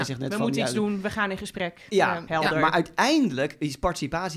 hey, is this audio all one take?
no; 1 cut; at 2.3 s

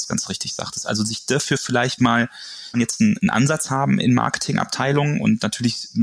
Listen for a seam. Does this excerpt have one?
yes; 3 cuts; at 2.0 s, 2.7 s, 4.0 s

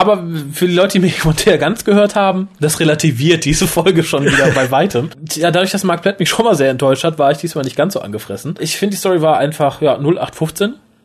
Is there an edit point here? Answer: no; 0 cuts

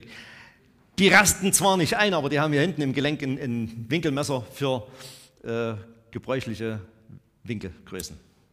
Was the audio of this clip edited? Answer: no; 0 cuts

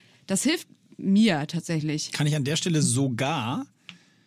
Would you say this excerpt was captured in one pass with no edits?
yes; 0 cuts

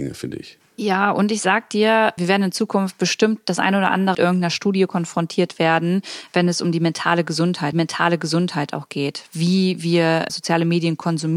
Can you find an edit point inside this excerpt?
yes; 4 cuts; at 2.2 s, 4.1 s, 7.7 s, 10.3 s

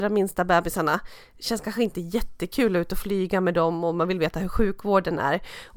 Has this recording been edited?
no; 0 cuts

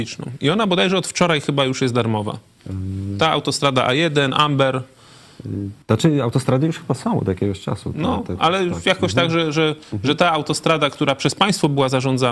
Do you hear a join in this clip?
yes; 1 cut; at 5.8 s

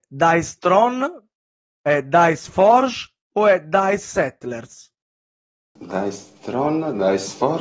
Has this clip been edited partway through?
no; 0 cuts

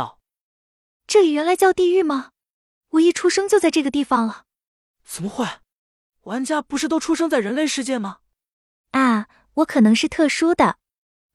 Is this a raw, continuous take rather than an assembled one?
yes; 0 cuts

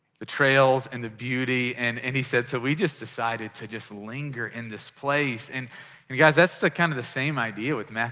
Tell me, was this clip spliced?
no; 0 cuts

